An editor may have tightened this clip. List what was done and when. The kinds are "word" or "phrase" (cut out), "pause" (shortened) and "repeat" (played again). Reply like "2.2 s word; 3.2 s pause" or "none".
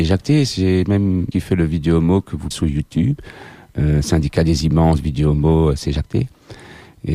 1.3 s phrase; 2.5 s phrase